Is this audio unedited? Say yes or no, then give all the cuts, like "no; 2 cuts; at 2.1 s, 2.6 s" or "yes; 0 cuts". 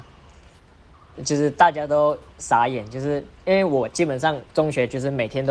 no; 1 cut; at 4.5 s